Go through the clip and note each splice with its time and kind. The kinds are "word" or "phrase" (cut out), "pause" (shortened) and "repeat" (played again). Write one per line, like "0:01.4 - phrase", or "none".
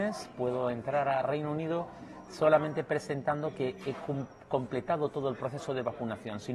none

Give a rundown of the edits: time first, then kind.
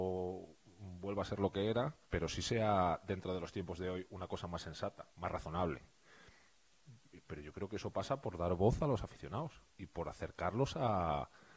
0:02.0 - pause
0:05.1 - pause

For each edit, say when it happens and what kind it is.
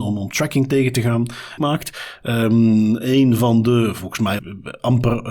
0:01.6 - phrase
0:04.4 - word

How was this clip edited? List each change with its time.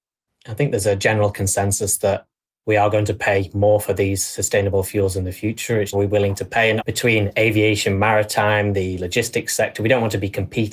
0:05.9 - phrase
0:06.8 - word

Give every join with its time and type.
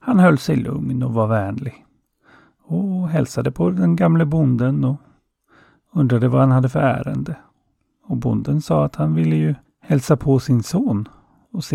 0:09.7 - pause

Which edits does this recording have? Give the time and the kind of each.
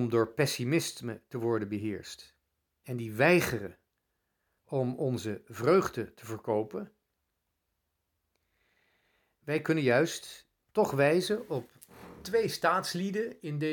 0:10.6 - pause

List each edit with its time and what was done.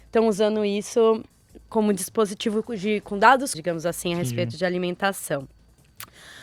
0:03.5 - word

